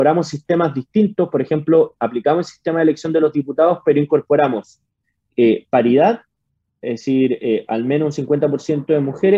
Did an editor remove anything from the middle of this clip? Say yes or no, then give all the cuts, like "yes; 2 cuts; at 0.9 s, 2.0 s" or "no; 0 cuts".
no; 0 cuts